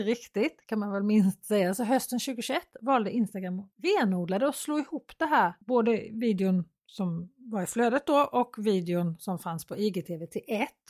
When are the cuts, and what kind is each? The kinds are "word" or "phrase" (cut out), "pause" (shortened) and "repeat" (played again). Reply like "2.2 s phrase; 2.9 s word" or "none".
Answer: 3.7 s pause; 5.6 s pause

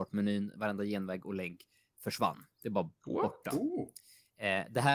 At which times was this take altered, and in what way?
none

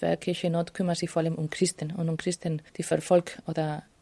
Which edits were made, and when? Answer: 2.7 s pause

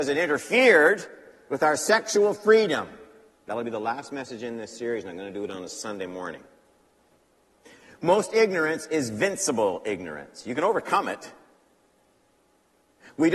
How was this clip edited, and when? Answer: none

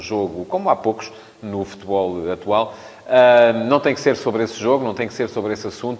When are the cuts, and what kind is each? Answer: none

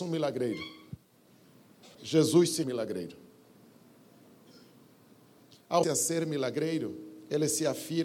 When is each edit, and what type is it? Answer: 1.9 s pause; 2.6 s phrase; 5.8 s word

